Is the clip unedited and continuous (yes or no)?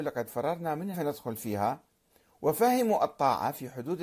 no